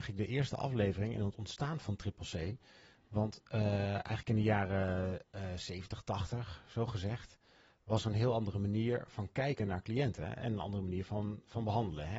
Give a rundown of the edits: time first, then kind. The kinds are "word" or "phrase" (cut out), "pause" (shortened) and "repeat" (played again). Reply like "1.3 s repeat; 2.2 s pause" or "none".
1.8 s word